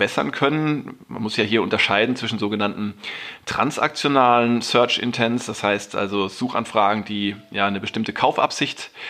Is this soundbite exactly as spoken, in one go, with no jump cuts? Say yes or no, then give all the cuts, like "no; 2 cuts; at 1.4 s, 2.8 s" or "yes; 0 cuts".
yes; 0 cuts